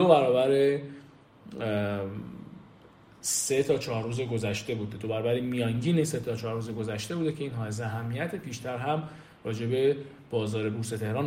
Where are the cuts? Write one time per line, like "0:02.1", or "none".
none